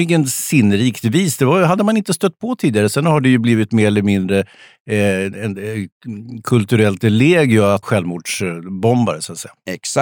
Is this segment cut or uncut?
cut